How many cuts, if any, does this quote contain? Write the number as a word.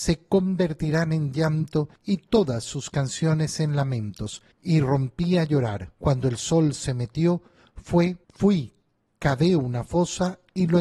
four